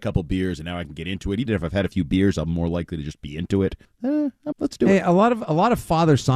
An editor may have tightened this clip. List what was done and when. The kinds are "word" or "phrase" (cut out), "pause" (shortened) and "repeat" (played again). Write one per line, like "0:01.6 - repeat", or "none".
0:01.5 - phrase
0:03.8 - pause
0:04.5 - word